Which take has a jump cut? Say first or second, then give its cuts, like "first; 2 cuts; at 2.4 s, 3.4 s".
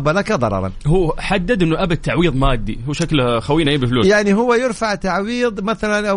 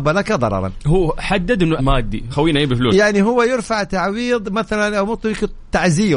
second; 2 cuts; at 1.8 s, 2.3 s